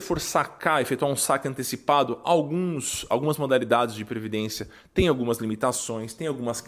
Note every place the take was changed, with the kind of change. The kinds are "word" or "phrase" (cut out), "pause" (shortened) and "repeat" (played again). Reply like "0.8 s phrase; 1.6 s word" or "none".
none